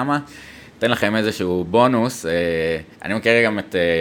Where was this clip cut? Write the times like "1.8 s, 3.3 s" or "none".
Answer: 2.9 s